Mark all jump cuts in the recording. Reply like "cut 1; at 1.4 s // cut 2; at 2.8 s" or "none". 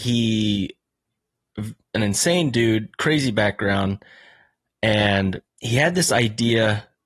cut 1; at 5.5 s